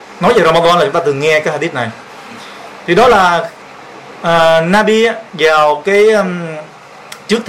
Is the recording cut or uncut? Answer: cut